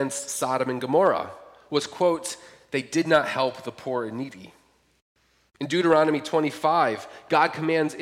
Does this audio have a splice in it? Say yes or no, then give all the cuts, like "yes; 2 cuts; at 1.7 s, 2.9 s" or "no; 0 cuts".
no; 0 cuts